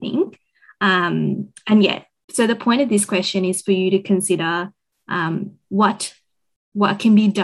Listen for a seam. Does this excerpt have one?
no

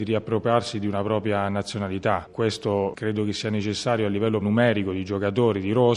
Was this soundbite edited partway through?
yes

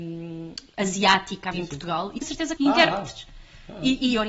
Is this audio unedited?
no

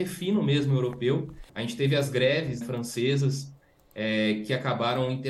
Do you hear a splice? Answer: yes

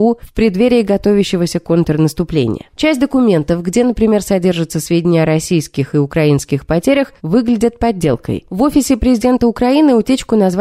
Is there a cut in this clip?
no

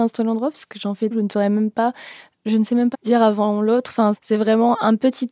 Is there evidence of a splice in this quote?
yes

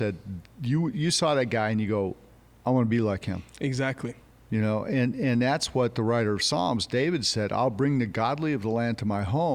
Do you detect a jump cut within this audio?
no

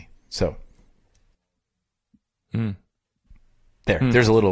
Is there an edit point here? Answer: no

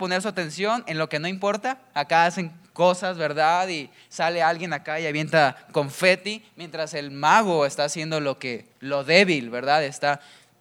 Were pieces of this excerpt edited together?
yes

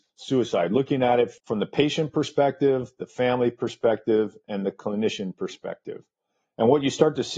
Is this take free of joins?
yes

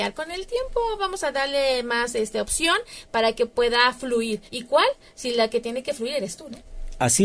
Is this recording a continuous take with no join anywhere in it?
no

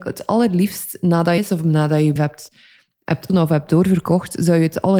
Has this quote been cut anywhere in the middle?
yes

